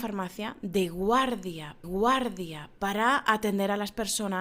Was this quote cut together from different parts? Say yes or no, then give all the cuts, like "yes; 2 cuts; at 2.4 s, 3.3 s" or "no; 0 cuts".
yes; 1 cut; at 1.8 s